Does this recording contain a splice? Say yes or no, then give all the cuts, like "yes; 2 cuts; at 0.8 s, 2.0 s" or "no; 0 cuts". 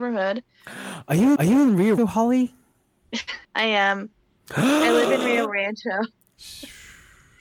yes; 3 cuts; at 1.4 s, 2.0 s, 3.4 s